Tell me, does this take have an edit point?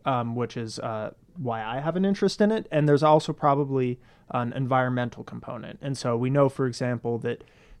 no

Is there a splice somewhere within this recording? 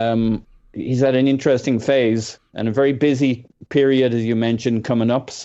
no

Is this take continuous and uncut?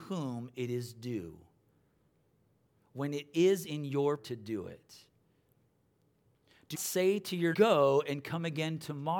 no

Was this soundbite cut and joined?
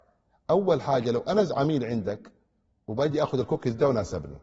no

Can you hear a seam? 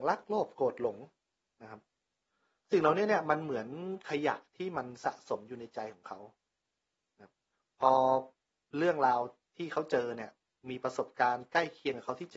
no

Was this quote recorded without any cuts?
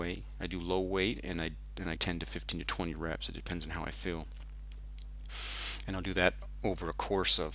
no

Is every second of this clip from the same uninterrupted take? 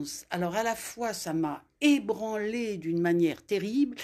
yes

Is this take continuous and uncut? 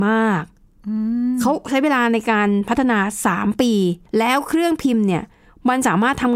no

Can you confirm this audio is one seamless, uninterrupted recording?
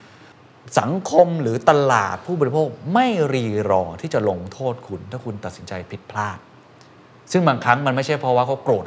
yes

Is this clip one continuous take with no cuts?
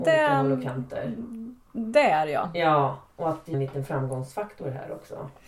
no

